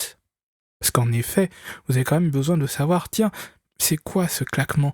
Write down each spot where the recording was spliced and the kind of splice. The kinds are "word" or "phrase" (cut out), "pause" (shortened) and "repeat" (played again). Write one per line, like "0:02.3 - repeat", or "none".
none